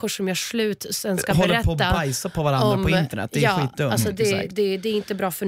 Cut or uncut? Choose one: uncut